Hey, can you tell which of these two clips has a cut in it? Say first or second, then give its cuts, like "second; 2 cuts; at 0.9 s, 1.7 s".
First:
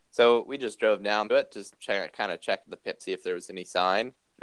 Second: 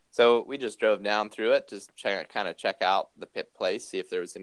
first; 3 cuts; at 1.3 s, 2.6 s, 3.0 s